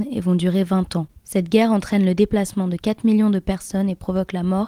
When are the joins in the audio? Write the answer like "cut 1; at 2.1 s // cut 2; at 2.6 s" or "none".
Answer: none